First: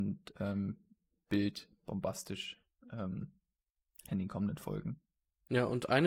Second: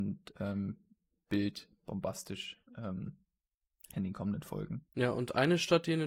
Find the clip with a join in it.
second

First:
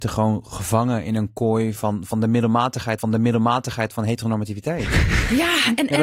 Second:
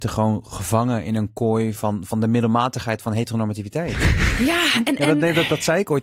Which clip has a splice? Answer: first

